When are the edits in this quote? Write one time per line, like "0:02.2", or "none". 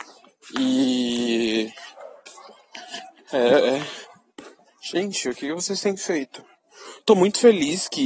0:04.7